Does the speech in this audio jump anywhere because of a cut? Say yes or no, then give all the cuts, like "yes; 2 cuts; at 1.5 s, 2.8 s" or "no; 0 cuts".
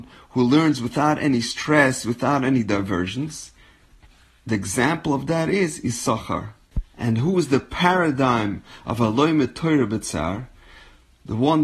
yes; 1 cut; at 6.9 s